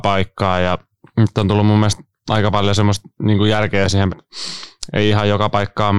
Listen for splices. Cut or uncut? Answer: cut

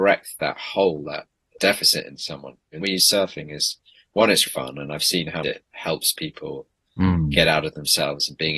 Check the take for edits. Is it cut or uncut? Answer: cut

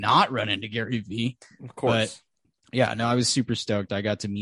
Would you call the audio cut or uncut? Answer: uncut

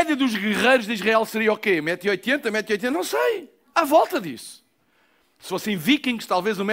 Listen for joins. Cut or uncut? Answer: uncut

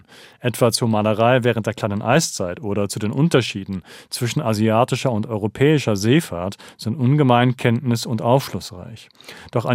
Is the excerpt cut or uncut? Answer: uncut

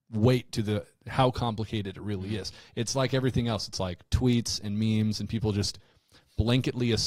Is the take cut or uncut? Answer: uncut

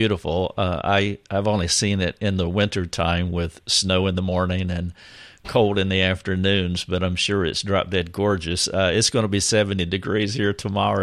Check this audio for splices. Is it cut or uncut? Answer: uncut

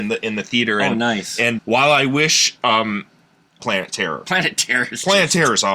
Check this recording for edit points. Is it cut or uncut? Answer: cut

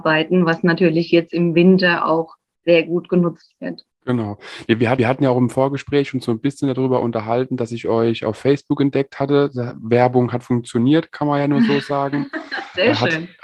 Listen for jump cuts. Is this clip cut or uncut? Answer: cut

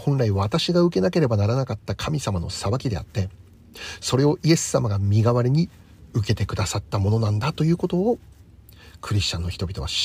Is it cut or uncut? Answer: uncut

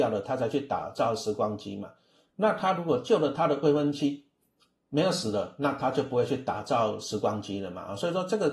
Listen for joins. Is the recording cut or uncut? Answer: uncut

